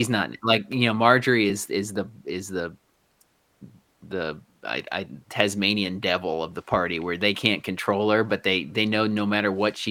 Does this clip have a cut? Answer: no; 0 cuts

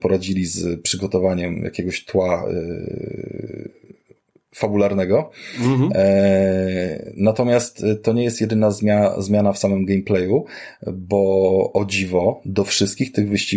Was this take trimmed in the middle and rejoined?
no; 0 cuts

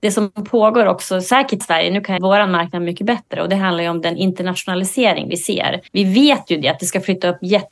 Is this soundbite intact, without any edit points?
no; 3 cuts; at 1.6 s, 2.2 s, 5.9 s

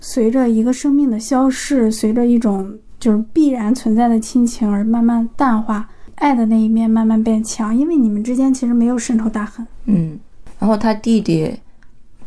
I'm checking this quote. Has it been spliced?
no; 0 cuts

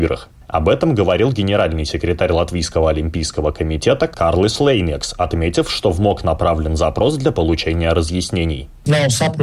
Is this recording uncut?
yes; 0 cuts

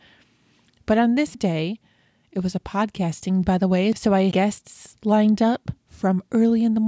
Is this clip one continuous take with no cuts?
no; 3 cuts; at 1.3 s, 3.4 s, 4.3 s

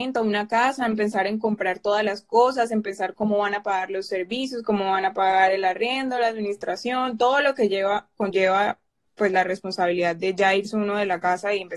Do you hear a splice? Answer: no; 0 cuts

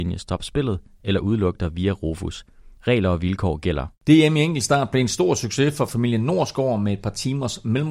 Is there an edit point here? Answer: yes; 1 cut; at 2.8 s

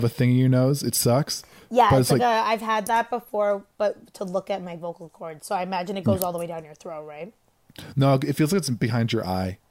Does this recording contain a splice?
no; 0 cuts

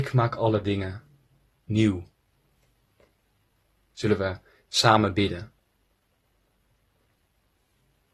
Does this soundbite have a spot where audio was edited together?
no; 0 cuts

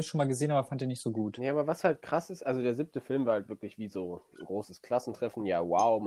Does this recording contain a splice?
no; 0 cuts

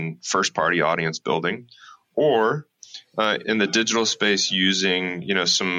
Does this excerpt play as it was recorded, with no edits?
no; 1 cut; at 3.4 s

